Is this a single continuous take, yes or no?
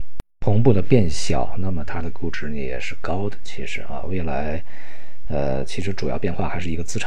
yes